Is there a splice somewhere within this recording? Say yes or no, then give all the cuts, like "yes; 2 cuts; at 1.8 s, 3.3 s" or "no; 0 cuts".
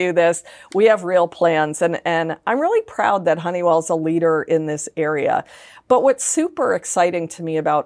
no; 0 cuts